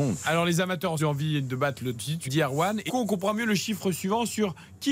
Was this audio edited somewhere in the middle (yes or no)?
yes